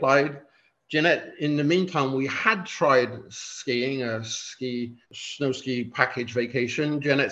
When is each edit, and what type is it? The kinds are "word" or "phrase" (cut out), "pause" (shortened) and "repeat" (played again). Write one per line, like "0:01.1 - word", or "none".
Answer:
0:05.0 - pause